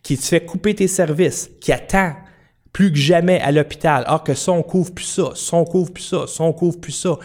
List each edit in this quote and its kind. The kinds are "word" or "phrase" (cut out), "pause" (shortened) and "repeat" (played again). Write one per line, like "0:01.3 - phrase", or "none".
none